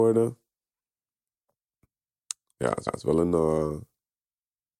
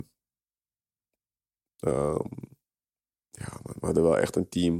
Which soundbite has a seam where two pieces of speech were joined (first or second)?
first